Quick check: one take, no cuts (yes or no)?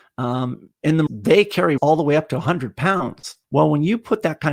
no